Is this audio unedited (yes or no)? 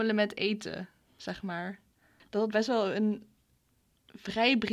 no